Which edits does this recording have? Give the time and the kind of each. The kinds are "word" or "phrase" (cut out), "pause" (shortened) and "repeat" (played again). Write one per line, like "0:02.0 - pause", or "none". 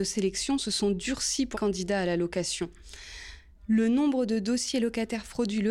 0:01.5 - word

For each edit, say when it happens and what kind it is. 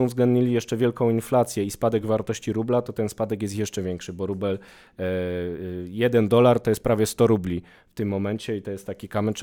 none

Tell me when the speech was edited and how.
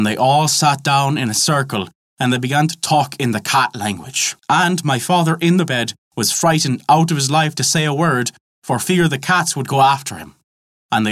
0:04.4 - pause

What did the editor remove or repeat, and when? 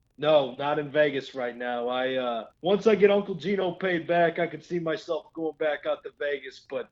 0:02.5 - pause

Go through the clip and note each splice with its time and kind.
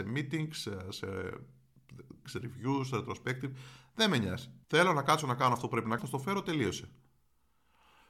0:02.2 - word
0:04.6 - pause
0:06.0 - word

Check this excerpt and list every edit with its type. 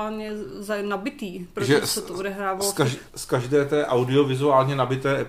0:03.1 - pause

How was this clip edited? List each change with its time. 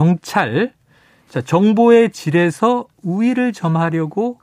none

